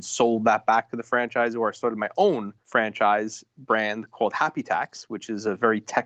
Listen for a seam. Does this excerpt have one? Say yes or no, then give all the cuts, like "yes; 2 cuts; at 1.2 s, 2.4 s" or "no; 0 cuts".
no; 0 cuts